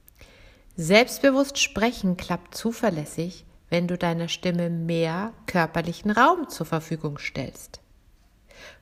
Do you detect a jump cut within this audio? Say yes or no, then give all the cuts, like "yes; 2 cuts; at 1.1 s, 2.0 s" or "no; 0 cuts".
no; 0 cuts